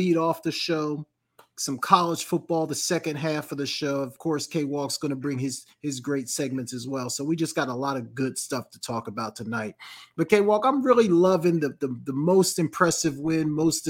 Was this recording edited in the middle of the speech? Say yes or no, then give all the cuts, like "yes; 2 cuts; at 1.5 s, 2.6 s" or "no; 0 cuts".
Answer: no; 0 cuts